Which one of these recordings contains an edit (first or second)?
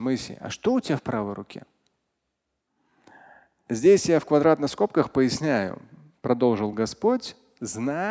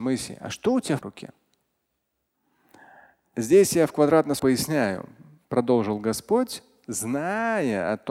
second